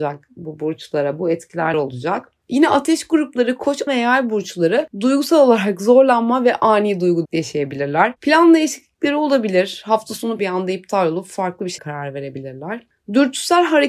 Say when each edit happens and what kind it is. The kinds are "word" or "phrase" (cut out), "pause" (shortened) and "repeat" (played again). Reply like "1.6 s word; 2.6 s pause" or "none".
1.7 s word; 3.9 s word; 7.2 s word; 10.4 s word; 11.8 s word